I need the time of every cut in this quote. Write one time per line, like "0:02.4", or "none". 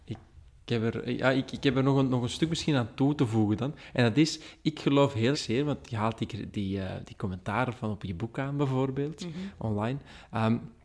0:05.3